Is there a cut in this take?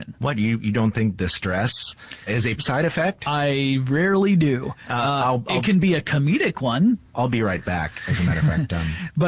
yes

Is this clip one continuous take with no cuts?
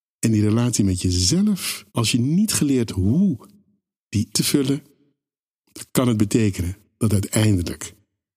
no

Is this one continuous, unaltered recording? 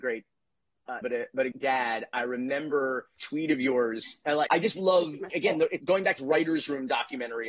no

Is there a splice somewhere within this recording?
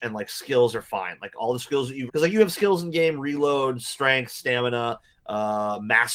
yes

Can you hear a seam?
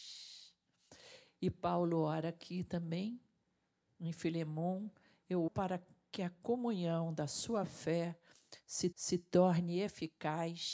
yes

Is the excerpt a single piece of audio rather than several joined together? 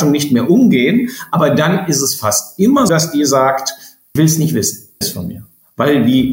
no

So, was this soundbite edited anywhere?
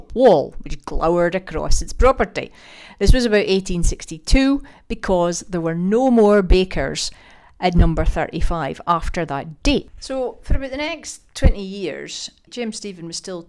yes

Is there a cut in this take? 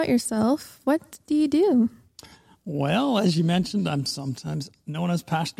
no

